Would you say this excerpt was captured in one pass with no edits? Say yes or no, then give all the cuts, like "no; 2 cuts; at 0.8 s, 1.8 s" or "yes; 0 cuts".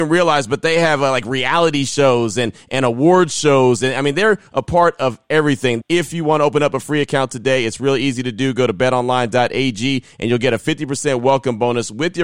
yes; 0 cuts